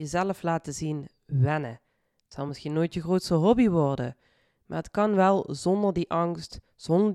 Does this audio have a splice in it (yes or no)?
no